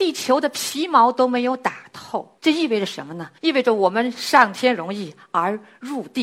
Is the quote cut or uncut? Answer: cut